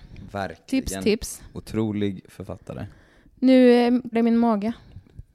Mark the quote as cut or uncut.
cut